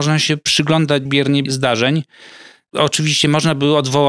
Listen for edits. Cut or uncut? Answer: cut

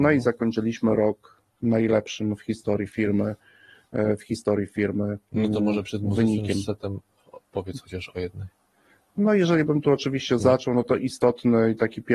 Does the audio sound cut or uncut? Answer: uncut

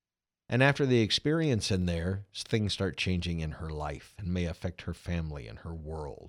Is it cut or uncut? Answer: uncut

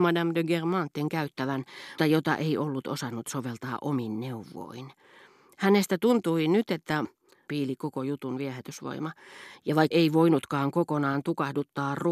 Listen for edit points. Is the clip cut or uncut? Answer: cut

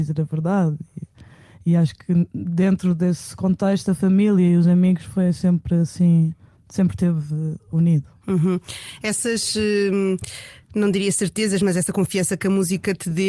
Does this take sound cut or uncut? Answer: uncut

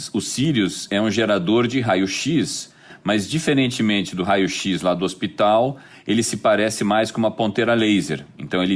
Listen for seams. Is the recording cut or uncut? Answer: uncut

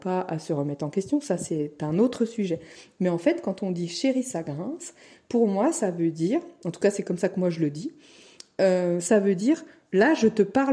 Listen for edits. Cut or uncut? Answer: uncut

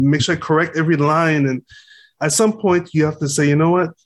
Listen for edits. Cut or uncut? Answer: uncut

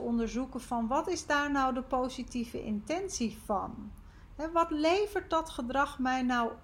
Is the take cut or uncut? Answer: uncut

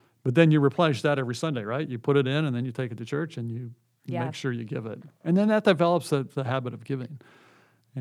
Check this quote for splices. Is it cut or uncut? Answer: uncut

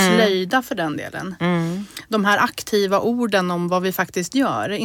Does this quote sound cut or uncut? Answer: uncut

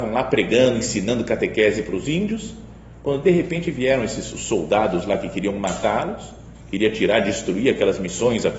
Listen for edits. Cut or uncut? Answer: uncut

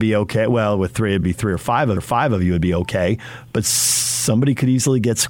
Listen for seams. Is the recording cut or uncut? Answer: cut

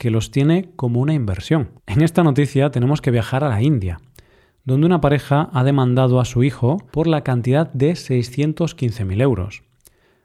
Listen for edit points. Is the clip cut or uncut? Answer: cut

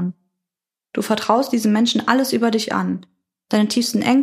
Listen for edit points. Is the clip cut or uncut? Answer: uncut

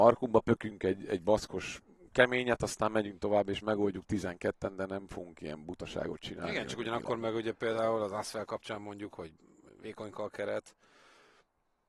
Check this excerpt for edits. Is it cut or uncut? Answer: uncut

